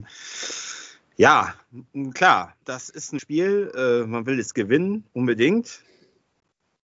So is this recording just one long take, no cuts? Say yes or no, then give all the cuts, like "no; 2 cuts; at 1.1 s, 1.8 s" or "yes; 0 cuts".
no; 3 cuts; at 2.6 s, 3.2 s, 5.1 s